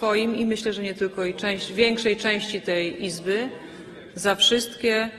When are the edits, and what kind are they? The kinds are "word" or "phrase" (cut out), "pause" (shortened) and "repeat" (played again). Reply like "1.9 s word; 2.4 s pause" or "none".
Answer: none